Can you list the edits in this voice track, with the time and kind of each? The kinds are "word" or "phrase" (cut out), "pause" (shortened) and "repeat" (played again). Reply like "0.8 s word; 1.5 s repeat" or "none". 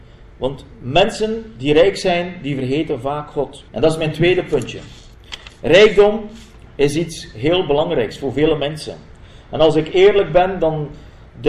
3.7 s pause

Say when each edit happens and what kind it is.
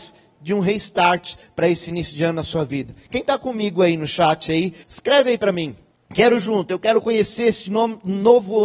4.8 s pause; 5.9 s pause

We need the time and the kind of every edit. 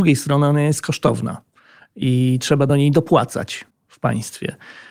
none

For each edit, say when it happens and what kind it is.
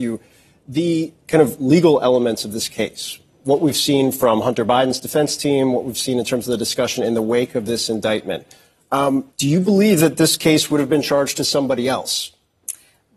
1.2 s pause; 9.3 s pause

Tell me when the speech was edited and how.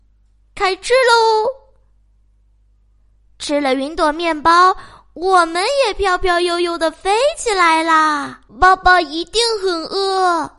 8.5 s pause

